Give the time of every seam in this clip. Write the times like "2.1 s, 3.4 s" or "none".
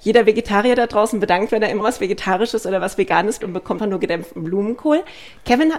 1.5 s, 1.8 s, 3.4 s, 3.8 s